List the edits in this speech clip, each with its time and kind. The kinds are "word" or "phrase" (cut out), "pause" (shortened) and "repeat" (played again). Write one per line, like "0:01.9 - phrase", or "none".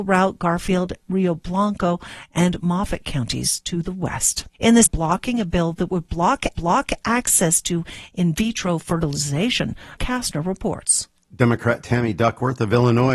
0:04.5 - pause
0:04.9 - phrase
0:06.5 - repeat
0:10.0 - word